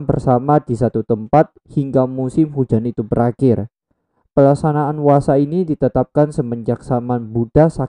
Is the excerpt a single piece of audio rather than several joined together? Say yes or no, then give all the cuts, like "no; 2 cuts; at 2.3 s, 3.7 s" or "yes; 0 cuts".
yes; 0 cuts